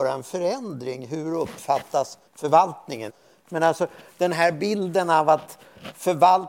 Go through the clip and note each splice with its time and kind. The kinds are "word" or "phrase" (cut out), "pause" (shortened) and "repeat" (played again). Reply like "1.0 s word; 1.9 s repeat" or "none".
2.3 s pause